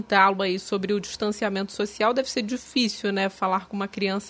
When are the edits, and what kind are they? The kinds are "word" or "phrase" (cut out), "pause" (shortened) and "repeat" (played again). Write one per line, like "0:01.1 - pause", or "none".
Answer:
none